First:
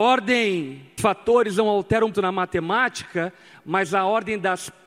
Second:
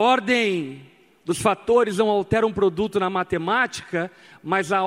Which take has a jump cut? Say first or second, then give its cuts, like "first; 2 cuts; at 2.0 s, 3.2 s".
first; 2 cuts; at 1.0 s, 2.1 s